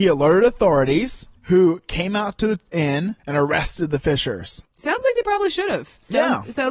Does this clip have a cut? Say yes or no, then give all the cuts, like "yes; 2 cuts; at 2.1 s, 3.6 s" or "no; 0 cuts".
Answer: yes; 3 cuts; at 1.4 s, 3.2 s, 4.7 s